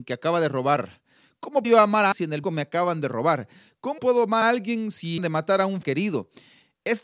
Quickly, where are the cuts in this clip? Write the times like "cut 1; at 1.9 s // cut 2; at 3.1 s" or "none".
cut 1; at 1.6 s // cut 2; at 2.1 s // cut 3; at 2.4 s // cut 4; at 4.0 s // cut 5; at 4.4 s // cut 6; at 5.2 s // cut 7; at 5.8 s

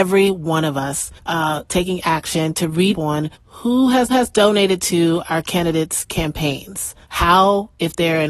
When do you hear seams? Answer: cut 1; at 1.2 s // cut 2; at 2.0 s // cut 3; at 2.9 s // cut 4; at 3.3 s // cut 5; at 4.1 s // cut 6; at 7.0 s

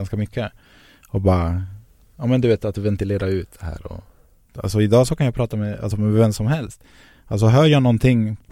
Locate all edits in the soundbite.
none

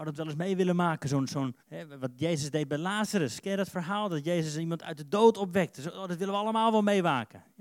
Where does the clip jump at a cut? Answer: cut 1; at 1.6 s

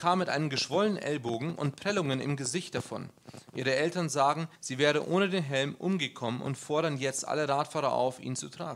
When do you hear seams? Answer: cut 1; at 4.5 s

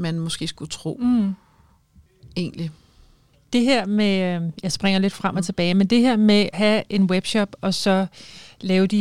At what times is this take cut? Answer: cut 1; at 6.5 s

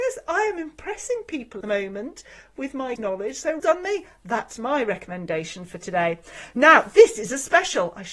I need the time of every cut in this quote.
cut 1; at 1.6 s // cut 2; at 3.0 s // cut 3; at 3.6 s

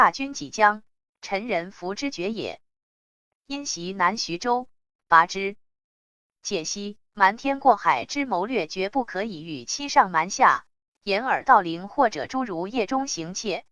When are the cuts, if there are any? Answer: cut 1; at 7.1 s

